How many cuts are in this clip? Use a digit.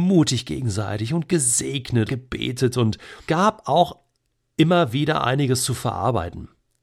2